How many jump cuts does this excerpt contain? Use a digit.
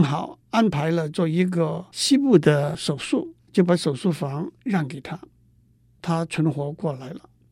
1